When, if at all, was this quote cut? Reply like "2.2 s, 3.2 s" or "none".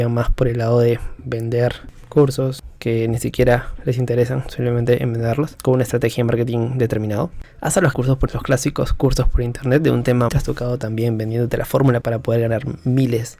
7.9 s, 8.3 s, 10.3 s, 12.0 s